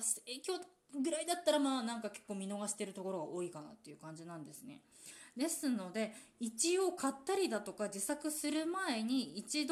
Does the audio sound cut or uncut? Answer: uncut